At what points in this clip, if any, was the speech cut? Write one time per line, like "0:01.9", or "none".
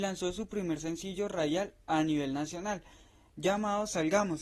none